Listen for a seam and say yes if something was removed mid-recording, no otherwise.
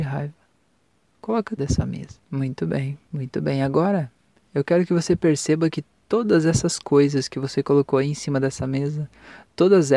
yes